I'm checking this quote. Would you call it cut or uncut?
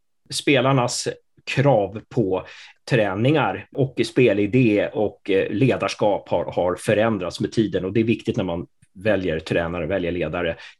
uncut